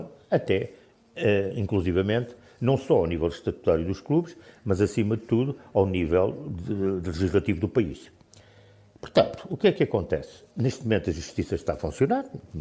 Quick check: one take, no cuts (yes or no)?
yes